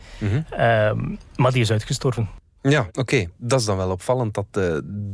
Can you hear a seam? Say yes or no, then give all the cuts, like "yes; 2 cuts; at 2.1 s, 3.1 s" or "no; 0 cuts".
no; 0 cuts